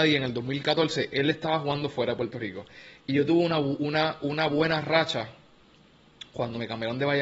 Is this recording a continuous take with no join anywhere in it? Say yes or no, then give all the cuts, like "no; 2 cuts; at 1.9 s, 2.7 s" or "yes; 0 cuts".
yes; 0 cuts